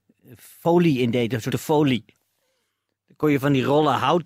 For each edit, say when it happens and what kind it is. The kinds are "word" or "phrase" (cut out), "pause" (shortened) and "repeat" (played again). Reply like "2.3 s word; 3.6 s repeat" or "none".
1.5 s word